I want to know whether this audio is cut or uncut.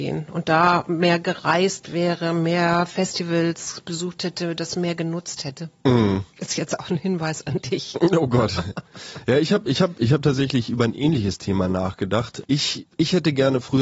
cut